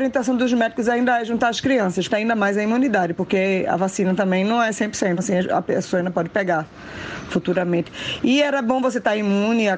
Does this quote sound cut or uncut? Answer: cut